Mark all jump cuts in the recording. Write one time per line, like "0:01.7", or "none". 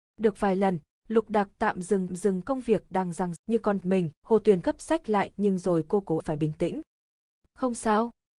0:02.1
0:03.4
0:03.8
0:04.2
0:04.6
0:06.2

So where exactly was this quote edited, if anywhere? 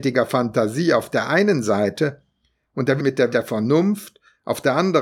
0:03.0
0:03.3

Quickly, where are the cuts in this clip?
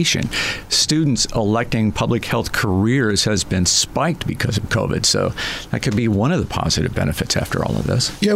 none

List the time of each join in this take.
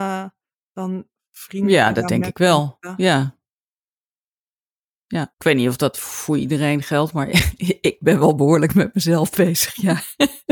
0:05.3

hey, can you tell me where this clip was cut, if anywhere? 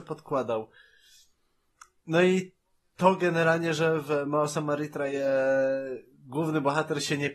none

